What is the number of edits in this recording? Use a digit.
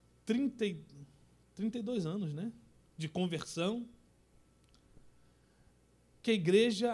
0